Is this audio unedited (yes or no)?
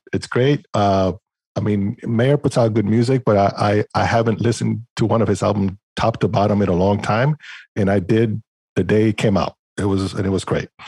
yes